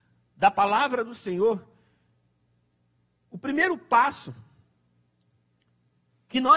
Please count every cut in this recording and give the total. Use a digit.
0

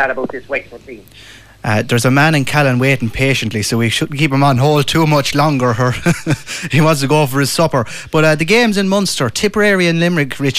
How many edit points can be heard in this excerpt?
0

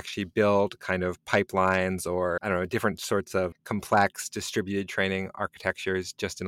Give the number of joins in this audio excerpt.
2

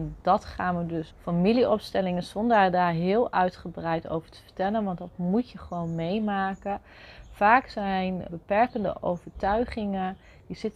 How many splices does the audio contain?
2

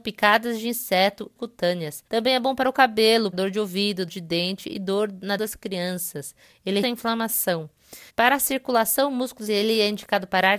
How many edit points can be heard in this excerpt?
8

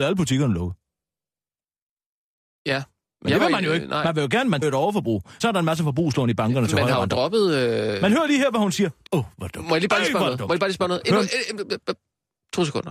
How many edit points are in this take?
3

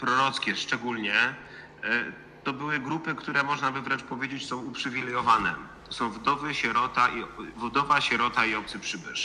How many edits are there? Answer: 0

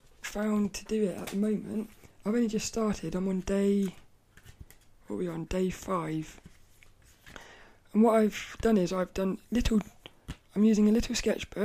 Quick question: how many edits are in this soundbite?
0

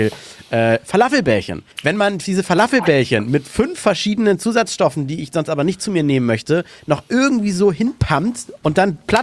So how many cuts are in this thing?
1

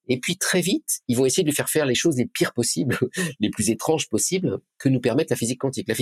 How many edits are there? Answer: 0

